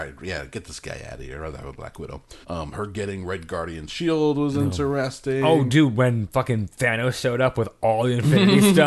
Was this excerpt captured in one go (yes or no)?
no